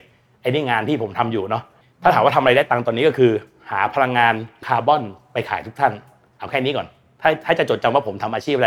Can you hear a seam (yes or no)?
yes